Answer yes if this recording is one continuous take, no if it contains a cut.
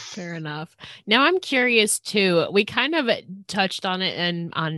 yes